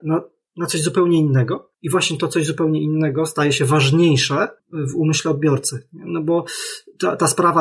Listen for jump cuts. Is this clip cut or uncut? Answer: cut